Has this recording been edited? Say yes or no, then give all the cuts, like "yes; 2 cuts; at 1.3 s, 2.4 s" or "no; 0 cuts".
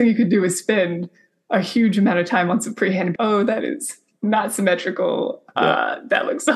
yes; 1 cut; at 3.2 s